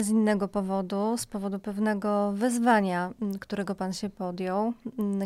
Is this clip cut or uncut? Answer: uncut